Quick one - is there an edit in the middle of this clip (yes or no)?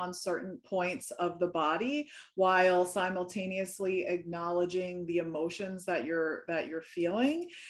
no